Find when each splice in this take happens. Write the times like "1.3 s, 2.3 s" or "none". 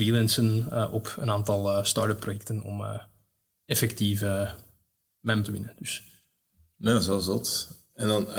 5.4 s